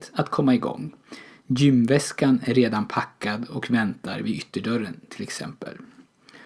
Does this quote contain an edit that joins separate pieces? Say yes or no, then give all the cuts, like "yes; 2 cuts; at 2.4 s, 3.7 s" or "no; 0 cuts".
no; 0 cuts